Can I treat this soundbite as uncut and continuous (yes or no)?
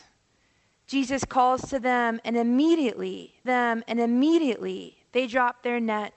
no